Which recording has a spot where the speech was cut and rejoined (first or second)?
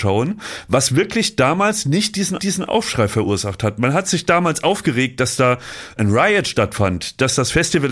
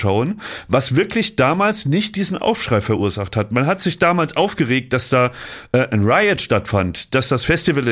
first